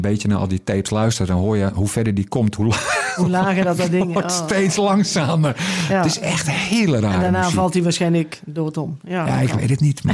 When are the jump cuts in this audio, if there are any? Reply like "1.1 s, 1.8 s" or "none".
none